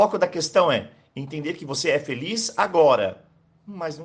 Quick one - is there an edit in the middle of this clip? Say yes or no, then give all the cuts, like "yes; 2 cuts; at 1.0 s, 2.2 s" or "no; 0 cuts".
no; 0 cuts